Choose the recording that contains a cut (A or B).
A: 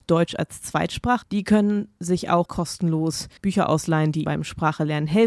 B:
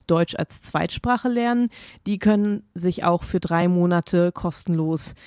A